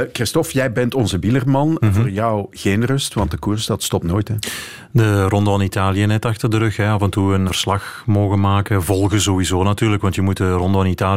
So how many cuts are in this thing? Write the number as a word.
one